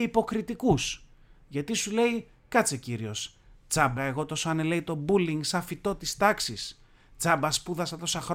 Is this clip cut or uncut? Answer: cut